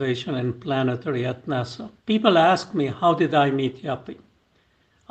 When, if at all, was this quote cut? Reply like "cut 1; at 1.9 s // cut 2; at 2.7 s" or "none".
cut 1; at 2.0 s